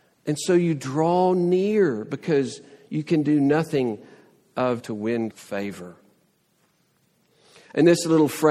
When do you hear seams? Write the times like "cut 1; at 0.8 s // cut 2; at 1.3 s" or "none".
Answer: cut 1; at 4.8 s // cut 2; at 5.3 s